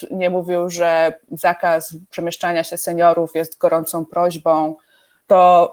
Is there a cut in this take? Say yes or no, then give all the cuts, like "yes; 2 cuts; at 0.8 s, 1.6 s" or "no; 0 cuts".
no; 0 cuts